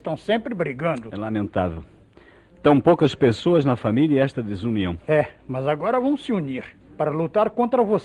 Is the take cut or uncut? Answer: uncut